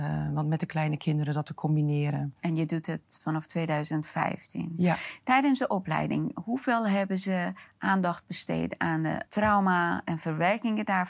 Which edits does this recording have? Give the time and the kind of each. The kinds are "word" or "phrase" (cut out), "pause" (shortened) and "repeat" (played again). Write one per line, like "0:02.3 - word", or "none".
0:09.3 - pause